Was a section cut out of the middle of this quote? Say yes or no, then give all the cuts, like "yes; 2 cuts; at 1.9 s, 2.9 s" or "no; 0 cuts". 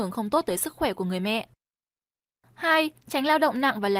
no; 0 cuts